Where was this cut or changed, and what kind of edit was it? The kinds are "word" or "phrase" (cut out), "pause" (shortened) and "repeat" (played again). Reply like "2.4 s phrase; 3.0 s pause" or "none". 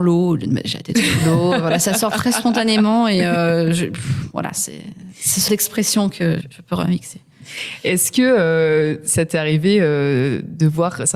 5.5 s word; 6.4 s word